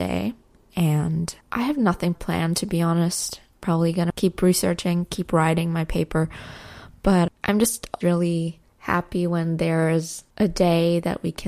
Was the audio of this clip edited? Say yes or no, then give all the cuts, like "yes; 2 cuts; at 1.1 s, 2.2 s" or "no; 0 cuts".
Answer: yes; 5 cuts; at 1.4 s, 2.1 s, 7.3 s, 8.0 s, 10.3 s